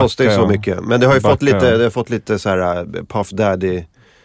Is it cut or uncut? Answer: uncut